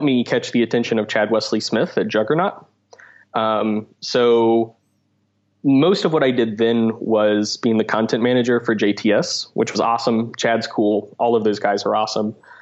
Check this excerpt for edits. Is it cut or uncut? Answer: uncut